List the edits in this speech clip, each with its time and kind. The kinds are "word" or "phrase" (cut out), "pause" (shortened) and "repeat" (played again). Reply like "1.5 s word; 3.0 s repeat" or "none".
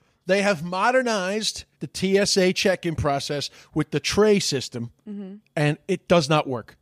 1.7 s pause